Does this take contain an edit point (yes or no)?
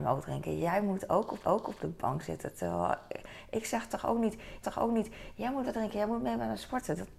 yes